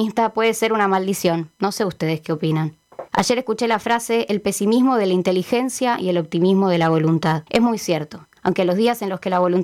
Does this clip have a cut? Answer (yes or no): yes